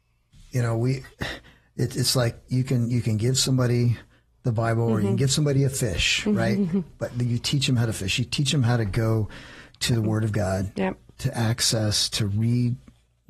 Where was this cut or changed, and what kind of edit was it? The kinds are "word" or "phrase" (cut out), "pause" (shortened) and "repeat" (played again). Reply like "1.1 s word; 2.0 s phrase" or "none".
1.1 s pause